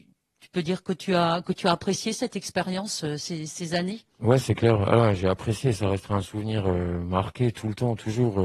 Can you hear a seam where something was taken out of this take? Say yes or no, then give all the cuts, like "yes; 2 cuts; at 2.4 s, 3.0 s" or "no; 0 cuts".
yes; 1 cut; at 3.5 s